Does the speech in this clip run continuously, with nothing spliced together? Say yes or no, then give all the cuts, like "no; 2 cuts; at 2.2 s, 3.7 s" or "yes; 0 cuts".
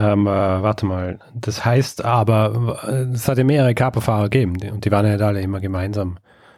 yes; 0 cuts